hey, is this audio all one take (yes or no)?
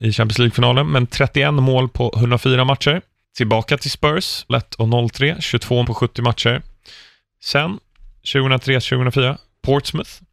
no